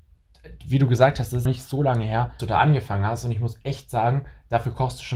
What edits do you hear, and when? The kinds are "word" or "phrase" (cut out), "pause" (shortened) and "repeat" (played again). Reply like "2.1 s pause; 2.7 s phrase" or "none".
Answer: 1.5 s phrase; 2.4 s word